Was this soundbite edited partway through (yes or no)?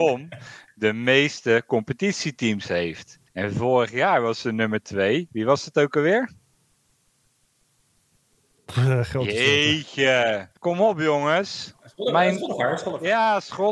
yes